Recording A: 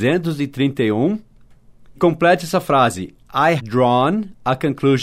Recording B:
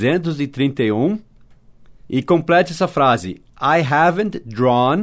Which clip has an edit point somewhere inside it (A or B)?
A